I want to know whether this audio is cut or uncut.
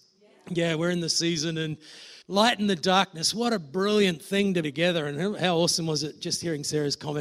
cut